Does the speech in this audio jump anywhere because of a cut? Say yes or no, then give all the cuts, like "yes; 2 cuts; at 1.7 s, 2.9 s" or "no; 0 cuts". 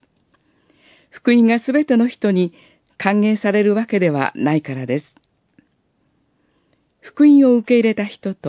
no; 0 cuts